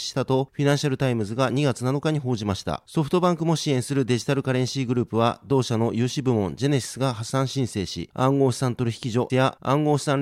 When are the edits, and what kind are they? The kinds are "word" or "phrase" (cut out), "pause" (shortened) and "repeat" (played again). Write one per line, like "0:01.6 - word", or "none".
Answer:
0:09.3 - word